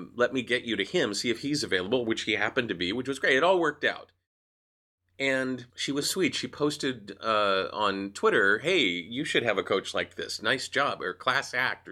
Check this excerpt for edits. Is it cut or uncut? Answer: cut